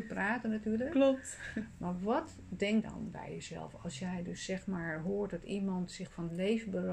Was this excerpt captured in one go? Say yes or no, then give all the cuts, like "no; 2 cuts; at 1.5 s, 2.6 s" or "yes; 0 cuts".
no; 1 cut; at 2.8 s